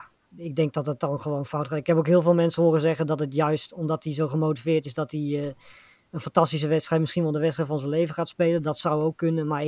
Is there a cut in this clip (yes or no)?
no